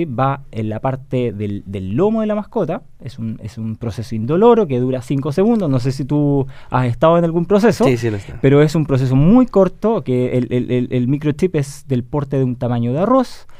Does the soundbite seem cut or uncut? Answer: uncut